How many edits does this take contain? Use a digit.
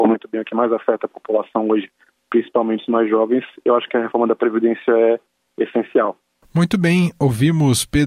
0